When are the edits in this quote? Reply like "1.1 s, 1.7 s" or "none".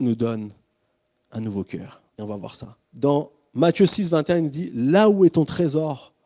2.1 s, 2.8 s